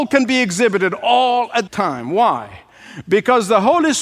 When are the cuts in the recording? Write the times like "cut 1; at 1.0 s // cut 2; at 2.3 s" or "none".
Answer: cut 1; at 1.7 s